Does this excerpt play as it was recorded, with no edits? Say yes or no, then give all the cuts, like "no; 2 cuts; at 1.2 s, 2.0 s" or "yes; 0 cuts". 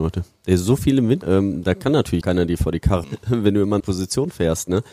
no; 4 cuts; at 1.2 s, 2.2 s, 3.0 s, 3.8 s